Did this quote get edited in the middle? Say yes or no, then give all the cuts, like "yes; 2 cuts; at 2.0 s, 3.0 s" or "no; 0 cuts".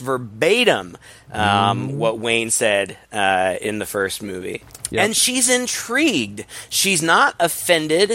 no; 0 cuts